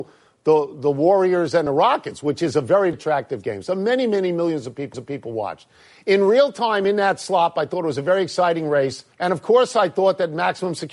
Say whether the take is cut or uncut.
cut